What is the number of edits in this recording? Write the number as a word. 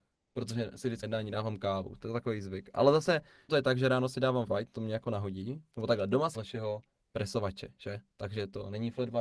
four